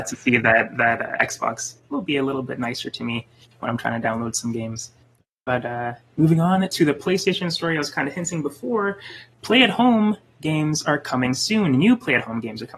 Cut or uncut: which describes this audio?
uncut